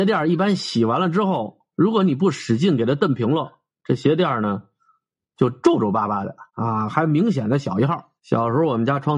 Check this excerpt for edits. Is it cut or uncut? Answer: cut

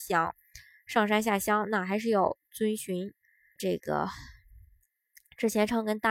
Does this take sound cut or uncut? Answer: cut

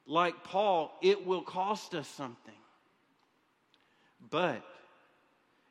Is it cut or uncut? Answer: uncut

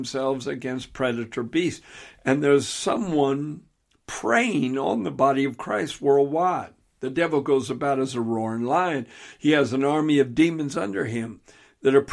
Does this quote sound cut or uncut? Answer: uncut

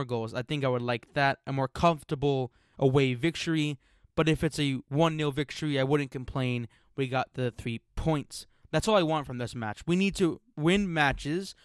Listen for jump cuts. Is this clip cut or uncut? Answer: uncut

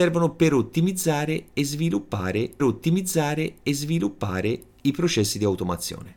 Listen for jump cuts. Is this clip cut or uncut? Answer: cut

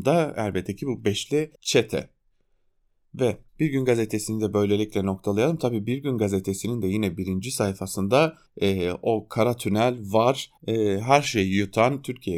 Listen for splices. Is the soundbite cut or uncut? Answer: cut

